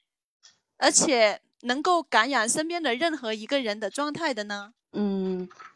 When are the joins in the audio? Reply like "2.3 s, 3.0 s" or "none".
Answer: 4.8 s